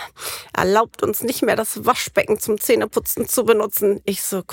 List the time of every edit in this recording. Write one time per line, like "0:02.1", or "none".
none